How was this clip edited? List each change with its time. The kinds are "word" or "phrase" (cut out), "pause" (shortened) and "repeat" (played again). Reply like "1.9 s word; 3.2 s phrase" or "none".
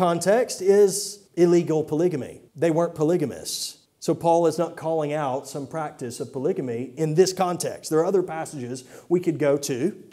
1.3 s pause; 2.5 s pause; 3.9 s pause